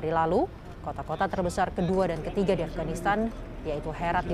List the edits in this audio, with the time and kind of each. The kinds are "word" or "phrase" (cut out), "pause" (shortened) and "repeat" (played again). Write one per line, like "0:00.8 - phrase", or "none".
none